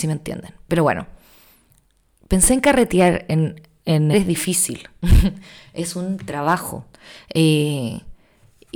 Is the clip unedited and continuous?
no; 1 cut; at 4.1 s

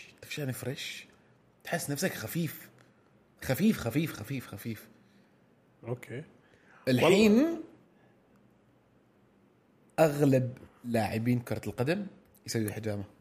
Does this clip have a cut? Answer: no; 0 cuts

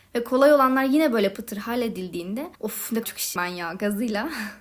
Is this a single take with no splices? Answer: no; 4 cuts; at 1.3 s, 2.6 s, 3.0 s, 3.4 s

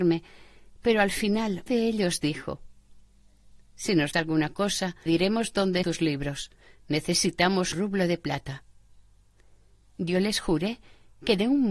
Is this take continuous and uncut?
no; 5 cuts; at 1.7 s, 4.1 s, 5.1 s, 5.8 s, 7.7 s

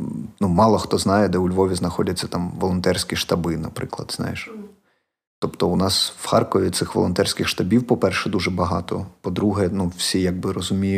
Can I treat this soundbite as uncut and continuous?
yes; 0 cuts

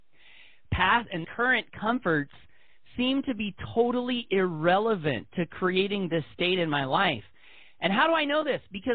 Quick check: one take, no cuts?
yes; 0 cuts

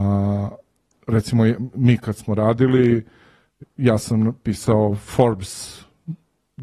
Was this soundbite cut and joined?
no; 0 cuts

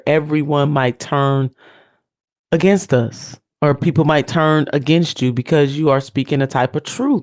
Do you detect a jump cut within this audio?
no; 0 cuts

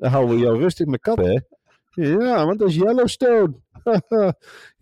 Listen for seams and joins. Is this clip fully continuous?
no; 1 cut; at 1.2 s

